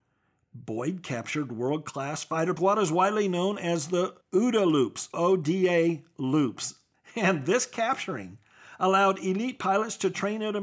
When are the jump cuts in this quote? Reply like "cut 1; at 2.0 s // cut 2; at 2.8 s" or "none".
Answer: cut 1; at 2.6 s // cut 2; at 4.2 s // cut 3; at 5.1 s // cut 4; at 6.9 s

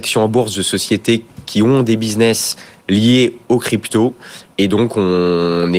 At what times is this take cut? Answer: none

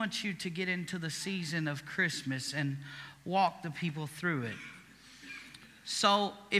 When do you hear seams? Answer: none

